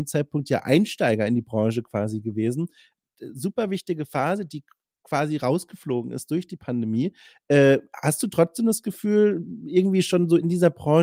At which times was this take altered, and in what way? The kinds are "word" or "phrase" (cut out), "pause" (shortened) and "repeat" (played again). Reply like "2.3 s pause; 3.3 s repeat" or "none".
none